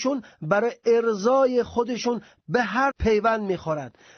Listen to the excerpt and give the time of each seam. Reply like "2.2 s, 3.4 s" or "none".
2.9 s

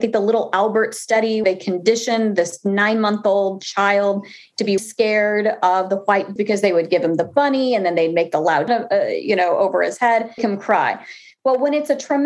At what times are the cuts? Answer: 1.4 s, 4.8 s, 6.4 s, 8.7 s, 10.4 s

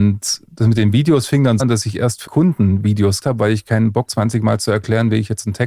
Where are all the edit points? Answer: 1.6 s, 2.3 s, 3.2 s, 4.1 s

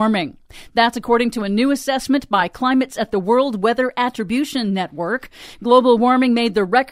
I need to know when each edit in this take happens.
2.9 s

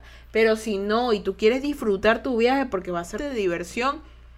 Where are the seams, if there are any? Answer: 3.2 s

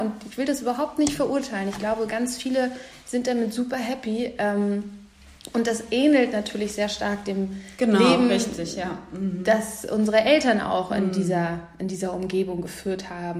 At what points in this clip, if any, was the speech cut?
none

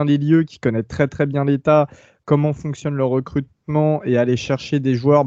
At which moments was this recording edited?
none

